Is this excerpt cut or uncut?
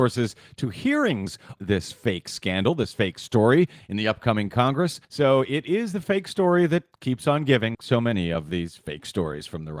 cut